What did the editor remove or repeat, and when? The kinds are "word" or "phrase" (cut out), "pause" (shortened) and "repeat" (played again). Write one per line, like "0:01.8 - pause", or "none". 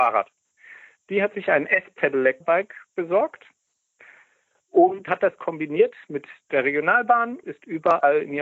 0:02.4 - word
0:05.1 - word
0:07.4 - word

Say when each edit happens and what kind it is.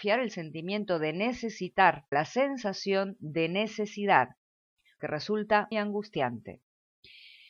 0:02.1 - word
0:05.0 - word
0:05.7 - word

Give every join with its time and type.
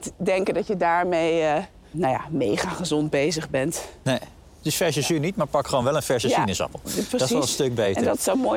none

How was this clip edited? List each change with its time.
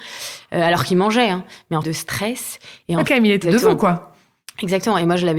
0:01.8 - word
0:03.1 - phrase
0:03.4 - word

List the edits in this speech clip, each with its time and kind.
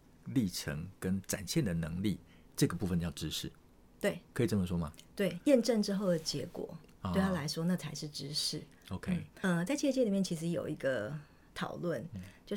none

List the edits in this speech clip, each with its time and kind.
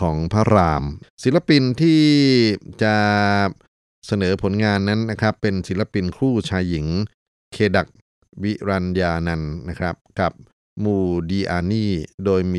none

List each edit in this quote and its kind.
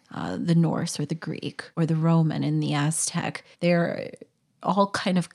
0:01.7 - pause
0:03.5 - pause

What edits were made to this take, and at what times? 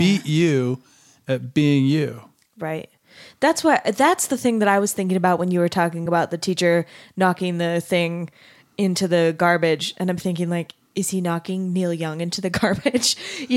none

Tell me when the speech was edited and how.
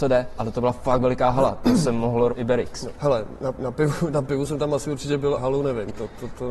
0:02.3 - word
0:05.4 - word

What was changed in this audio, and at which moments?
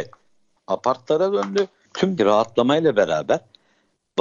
0:01.8 - word
0:02.2 - word

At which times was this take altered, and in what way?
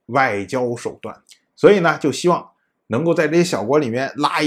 0:01.2 - pause

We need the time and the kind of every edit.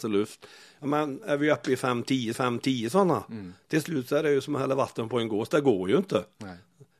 0:02.3 - repeat

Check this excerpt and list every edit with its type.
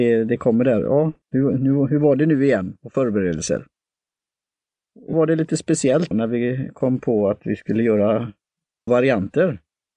0:01.2 - pause
0:05.1 - word
0:06.1 - word
0:08.9 - word

